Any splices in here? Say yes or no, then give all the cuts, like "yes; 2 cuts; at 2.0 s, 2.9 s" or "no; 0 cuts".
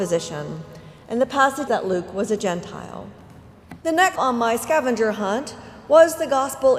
yes; 3 cuts; at 1.7 s, 3.8 s, 4.2 s